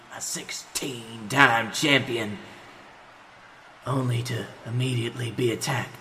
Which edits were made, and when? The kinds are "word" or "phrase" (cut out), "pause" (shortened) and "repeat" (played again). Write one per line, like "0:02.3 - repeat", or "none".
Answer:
none

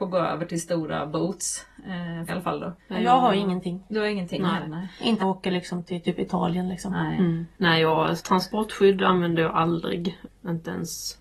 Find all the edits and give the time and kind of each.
0:02.3 - phrase
0:02.8 - pause
0:05.2 - phrase
0:07.5 - pause
0:08.2 - word

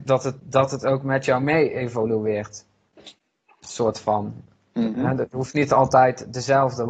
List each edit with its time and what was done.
none

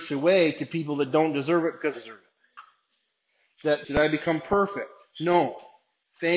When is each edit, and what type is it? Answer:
0:01.9 - phrase
0:03.8 - phrase

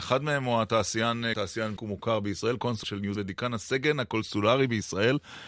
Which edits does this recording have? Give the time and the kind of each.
0:01.3 - phrase
0:01.8 - word
0:02.8 - word
0:03.2 - word

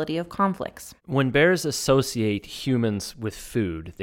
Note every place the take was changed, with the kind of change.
none

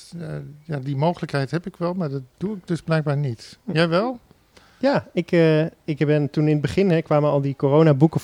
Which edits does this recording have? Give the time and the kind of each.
none

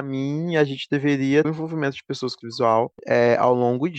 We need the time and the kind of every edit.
0:01.4 - word
0:02.4 - word

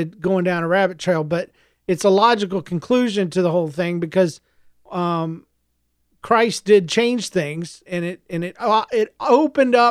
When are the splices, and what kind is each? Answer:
0:07.8 - word

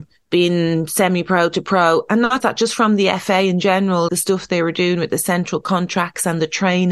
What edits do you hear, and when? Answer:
0:02.4 - word
0:04.1 - word

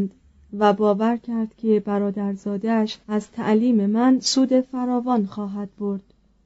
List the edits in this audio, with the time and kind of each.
0:03.0 - pause

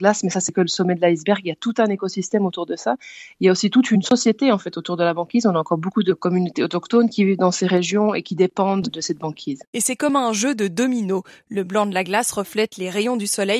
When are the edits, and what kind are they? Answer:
none

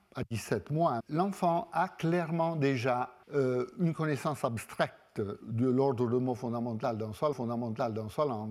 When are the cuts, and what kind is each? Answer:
0:01.0 - word
0:03.2 - pause
0:05.4 - word
0:07.3 - repeat

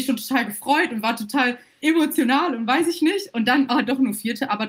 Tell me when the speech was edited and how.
none

